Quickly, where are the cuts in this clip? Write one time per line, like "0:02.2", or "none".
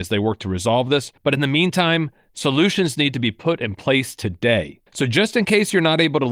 0:01.2
0:04.9